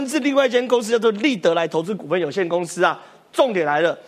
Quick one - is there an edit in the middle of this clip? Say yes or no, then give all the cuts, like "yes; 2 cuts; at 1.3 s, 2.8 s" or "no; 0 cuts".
no; 0 cuts